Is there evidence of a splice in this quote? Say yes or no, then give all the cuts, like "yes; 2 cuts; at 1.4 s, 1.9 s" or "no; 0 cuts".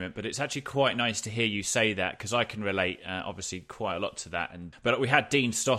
yes; 1 cut; at 4.7 s